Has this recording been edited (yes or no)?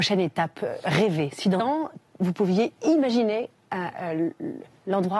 yes